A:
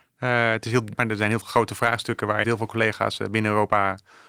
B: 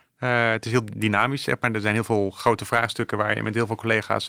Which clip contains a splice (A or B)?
A